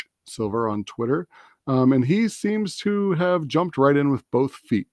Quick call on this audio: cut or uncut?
uncut